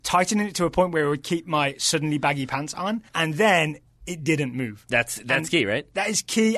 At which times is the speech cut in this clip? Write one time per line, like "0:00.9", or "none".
0:03.1